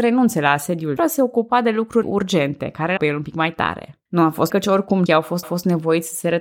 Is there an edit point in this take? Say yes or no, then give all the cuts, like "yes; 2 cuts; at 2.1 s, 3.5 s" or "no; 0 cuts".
yes; 7 cuts; at 1.0 s, 2.0 s, 3.0 s, 4.1 s, 4.5 s, 5.1 s, 5.4 s